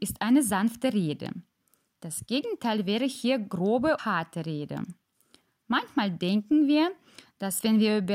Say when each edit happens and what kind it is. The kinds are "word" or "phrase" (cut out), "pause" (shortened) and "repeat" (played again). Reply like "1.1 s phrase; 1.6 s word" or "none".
4.0 s word